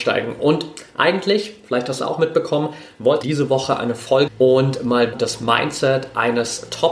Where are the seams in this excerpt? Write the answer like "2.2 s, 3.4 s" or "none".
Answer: 2.0 s, 3.2 s, 4.3 s, 5.1 s